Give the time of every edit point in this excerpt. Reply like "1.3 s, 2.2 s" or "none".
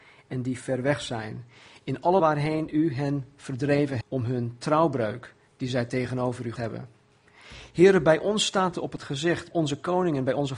2.2 s, 4.0 s, 6.6 s, 8.7 s, 9.5 s